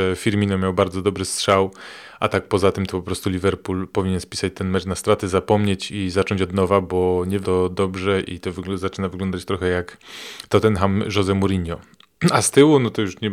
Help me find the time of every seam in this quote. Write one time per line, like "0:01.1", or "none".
0:07.4